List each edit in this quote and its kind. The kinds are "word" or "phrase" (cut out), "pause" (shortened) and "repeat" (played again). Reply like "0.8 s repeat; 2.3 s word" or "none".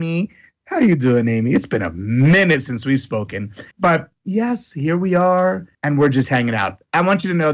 3.7 s pause; 5.7 s pause

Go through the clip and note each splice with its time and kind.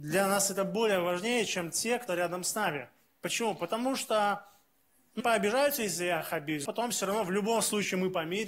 2.1 s word; 5.2 s word; 6.6 s word

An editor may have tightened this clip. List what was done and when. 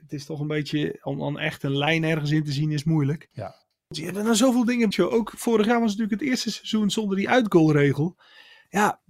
3.3 s pause; 4.9 s word

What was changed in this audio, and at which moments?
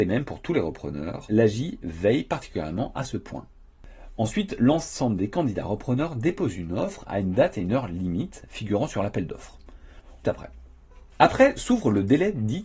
1.3 s word; 10.2 s phrase

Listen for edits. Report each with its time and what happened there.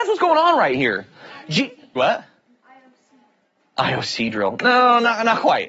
2.0 s word

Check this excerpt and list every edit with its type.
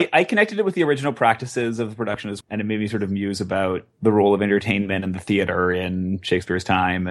2.4 s word; 3.9 s pause

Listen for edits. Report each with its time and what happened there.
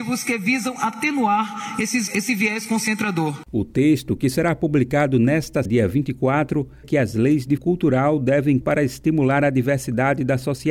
2.1 s word; 5.7 s word; 6.8 s word; 7.6 s word; 8.6 s word

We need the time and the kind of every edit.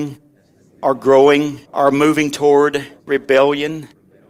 1.7 s pause; 3.0 s pause

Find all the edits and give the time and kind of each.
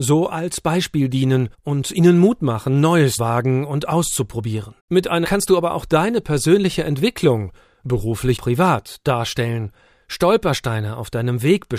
1.5 s pause; 3.2 s word; 4.8 s pause; 5.2 s word; 8.4 s word

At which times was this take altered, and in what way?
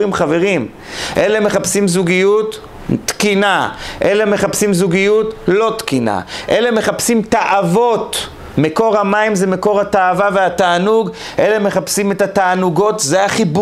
none

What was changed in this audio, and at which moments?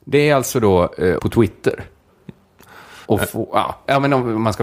1.2 s phrase; 3.0 s pause

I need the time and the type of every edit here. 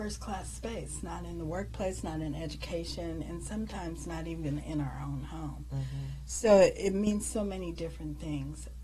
none

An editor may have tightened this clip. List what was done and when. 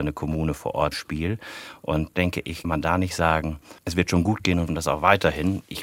0.9 s word; 2.1 s word; 2.6 s word; 3.8 s pause; 4.7 s phrase

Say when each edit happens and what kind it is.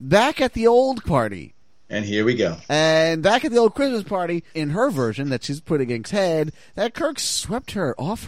1.0 s word; 3.2 s word; 4.5 s word; 6.0 s word

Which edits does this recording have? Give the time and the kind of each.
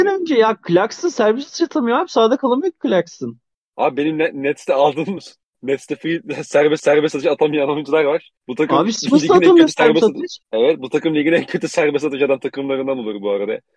5.2 s phrase; 6.8 s repeat; 8.4 s pause; 10.4 s pause

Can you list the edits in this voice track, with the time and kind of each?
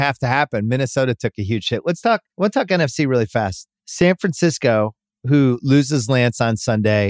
2.3 s pause; 3.8 s pause

